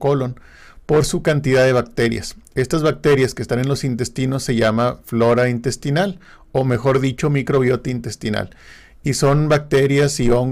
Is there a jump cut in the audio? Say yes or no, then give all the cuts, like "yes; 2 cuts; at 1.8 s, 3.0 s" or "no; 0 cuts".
no; 0 cuts